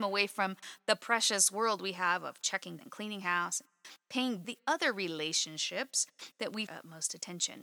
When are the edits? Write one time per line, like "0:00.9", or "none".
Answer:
0:02.8
0:04.4
0:06.7